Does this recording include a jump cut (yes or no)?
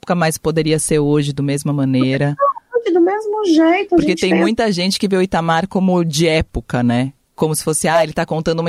no